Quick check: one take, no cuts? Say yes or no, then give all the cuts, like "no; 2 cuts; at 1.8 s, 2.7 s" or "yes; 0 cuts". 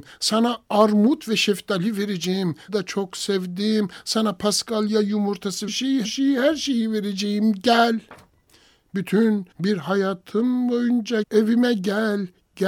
no; 5 cuts; at 2.7 s, 5.7 s, 6.0 s, 9.5 s, 11.2 s